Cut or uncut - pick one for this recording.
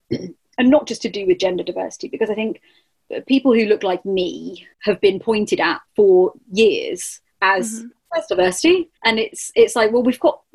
cut